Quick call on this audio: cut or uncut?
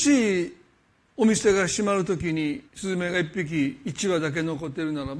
cut